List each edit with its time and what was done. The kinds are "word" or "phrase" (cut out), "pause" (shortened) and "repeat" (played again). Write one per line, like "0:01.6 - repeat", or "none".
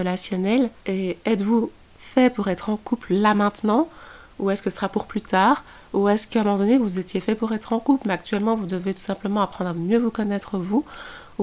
none